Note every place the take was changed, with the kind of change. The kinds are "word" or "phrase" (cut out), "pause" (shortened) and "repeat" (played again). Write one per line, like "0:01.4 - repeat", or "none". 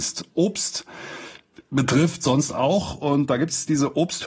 none